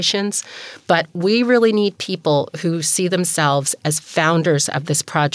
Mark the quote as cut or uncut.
uncut